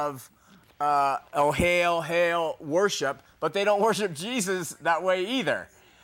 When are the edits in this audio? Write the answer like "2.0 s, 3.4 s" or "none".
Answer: 1.3 s